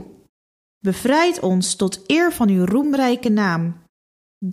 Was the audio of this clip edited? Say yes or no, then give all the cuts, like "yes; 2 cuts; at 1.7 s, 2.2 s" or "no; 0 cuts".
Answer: no; 0 cuts